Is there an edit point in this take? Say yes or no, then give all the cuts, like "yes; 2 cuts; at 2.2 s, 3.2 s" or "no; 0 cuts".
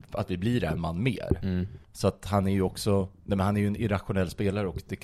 yes; 2 cuts; at 1.8 s, 3.2 s